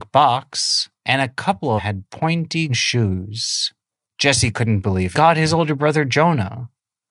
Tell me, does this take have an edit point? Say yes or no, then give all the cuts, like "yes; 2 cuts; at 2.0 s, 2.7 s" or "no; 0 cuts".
yes; 5 cuts; at 0.9 s, 1.8 s, 2.7 s, 3.9 s, 5.1 s